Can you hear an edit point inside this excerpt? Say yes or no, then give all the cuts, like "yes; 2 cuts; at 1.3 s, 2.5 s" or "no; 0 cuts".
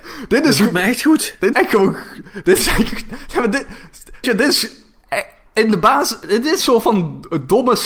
yes; 3 cuts; at 1.5 s, 4.2 s, 6.6 s